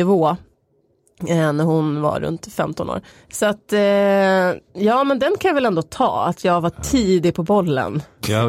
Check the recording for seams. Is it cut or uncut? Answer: cut